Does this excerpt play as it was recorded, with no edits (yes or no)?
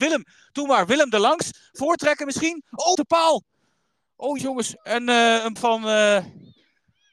no